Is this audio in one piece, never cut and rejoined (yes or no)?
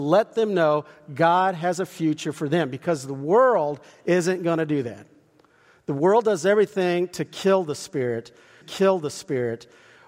no